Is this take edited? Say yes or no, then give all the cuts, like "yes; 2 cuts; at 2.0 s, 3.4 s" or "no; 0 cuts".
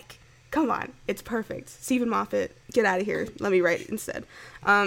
yes; 1 cut; at 2.6 s